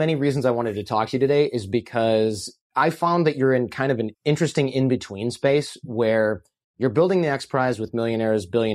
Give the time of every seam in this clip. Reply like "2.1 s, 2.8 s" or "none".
4.1 s